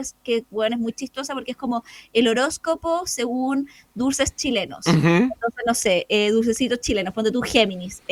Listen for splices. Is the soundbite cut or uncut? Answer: uncut